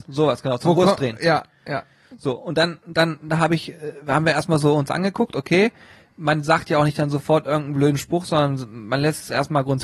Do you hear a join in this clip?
no; 0 cuts

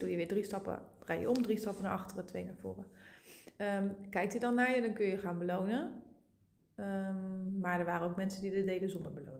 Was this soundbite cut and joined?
no; 0 cuts

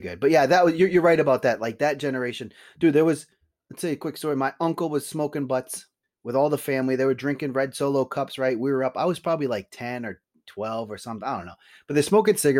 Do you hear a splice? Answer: yes; 1 cut; at 6.0 s

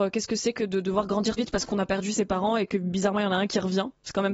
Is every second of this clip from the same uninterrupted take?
no; 1 cut; at 1.4 s

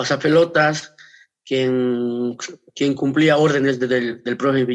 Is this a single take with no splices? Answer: yes; 0 cuts

